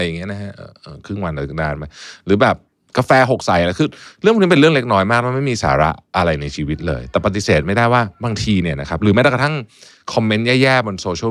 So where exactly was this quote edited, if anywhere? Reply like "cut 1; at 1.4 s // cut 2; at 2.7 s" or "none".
cut 1; at 2.7 s